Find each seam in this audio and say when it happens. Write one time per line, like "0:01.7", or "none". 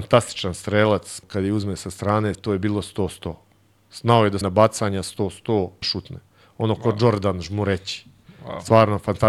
0:01.2
0:02.3
0:04.4
0:05.8